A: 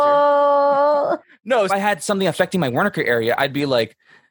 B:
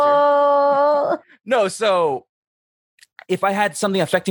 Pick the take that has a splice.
A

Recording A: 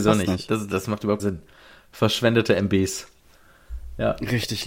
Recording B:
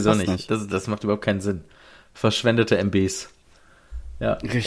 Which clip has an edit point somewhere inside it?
A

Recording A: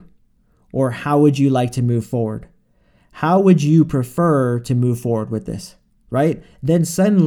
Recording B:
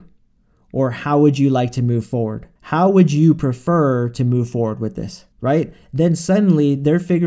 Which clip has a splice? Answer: B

